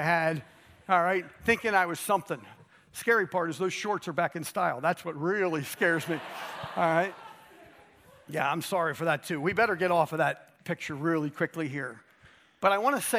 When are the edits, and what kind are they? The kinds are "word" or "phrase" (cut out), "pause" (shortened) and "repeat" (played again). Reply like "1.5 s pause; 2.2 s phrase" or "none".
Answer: none